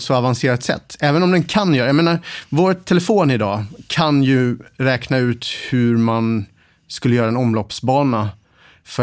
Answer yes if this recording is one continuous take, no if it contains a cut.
yes